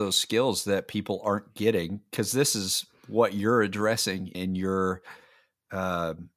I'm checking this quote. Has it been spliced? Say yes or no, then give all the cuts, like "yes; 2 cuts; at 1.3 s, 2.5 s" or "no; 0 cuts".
yes; 1 cut; at 4.3 s